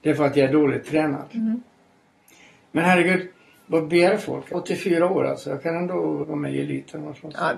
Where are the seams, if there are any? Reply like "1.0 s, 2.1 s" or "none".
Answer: 4.5 s, 6.2 s